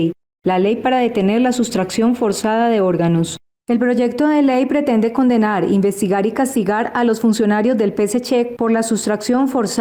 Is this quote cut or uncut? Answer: uncut